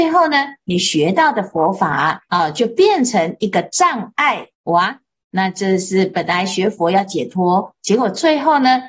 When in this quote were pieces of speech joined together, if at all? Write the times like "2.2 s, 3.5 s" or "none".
2.3 s, 4.5 s